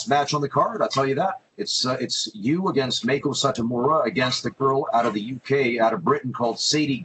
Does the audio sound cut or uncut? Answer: cut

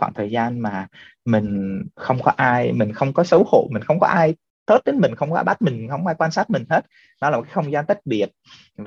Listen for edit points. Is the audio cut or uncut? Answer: uncut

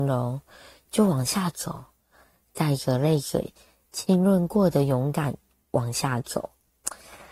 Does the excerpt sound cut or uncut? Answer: uncut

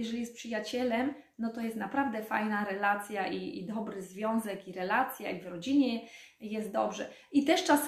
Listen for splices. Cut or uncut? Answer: uncut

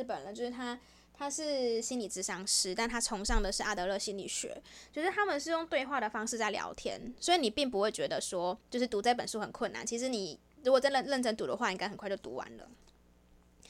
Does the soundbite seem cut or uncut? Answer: cut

